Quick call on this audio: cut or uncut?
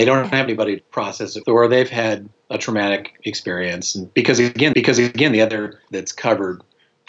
cut